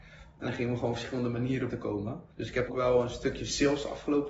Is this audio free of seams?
no; 3 cuts; at 1.7 s, 2.3 s, 2.7 s

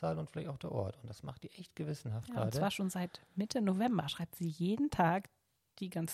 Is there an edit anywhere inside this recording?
no; 0 cuts

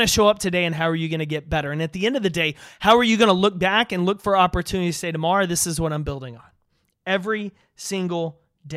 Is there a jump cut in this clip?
no; 0 cuts

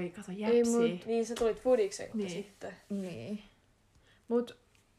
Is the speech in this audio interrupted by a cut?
yes; 1 cut; at 2.1 s

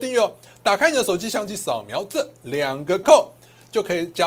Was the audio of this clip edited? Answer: yes; 1 cut; at 3.0 s

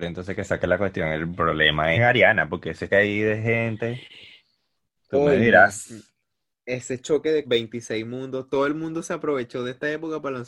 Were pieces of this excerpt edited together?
yes; 3 cuts; at 1.9 s, 2.9 s, 7.4 s

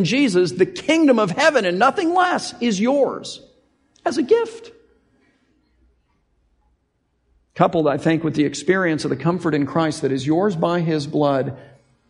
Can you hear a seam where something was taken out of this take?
no; 0 cuts

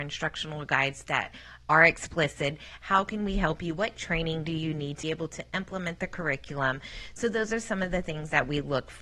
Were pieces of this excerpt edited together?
yes; 1 cut; at 5.0 s

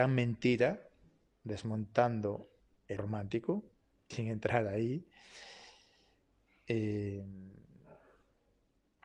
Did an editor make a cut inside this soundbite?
yes; 2 cuts; at 3.0 s, 4.1 s

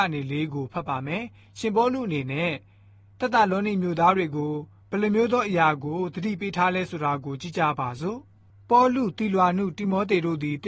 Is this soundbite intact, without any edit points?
yes; 0 cuts

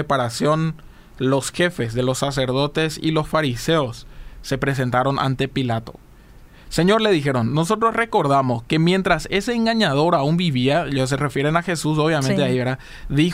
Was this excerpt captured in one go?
yes; 0 cuts

